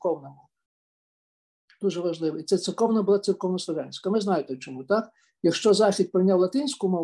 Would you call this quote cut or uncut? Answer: uncut